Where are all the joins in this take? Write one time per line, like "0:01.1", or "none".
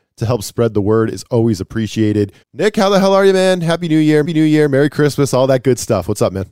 0:02.4
0:04.2